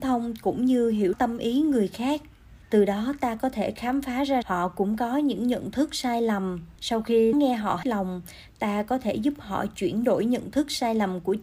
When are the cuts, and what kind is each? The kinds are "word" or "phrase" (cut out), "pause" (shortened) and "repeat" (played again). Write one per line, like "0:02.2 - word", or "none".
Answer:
0:01.1 - word
0:02.6 - pause
0:04.4 - word
0:06.8 - pause
0:07.3 - word
0:07.8 - word